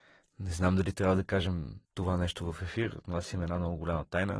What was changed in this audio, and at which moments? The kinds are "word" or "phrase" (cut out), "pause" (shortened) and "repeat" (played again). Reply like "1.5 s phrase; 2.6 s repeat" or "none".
1.8 s pause

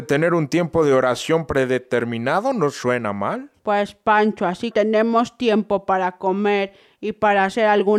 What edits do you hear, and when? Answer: 3.6 s pause; 4.7 s word

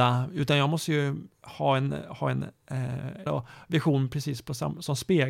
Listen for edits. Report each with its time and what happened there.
3.3 s phrase

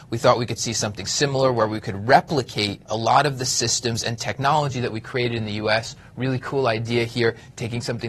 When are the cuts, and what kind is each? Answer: 2.9 s pause

